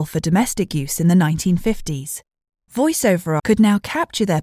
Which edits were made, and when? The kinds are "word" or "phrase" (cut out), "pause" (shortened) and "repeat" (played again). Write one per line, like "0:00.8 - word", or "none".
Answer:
0:03.4 - word